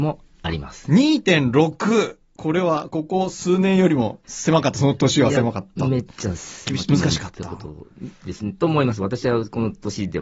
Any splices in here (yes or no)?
yes